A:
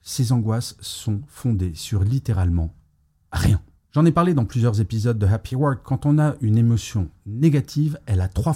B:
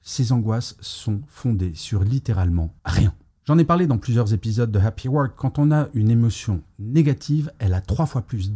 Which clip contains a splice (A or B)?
B